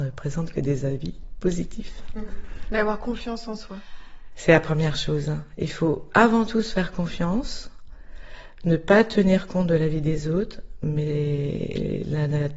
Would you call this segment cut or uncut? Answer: uncut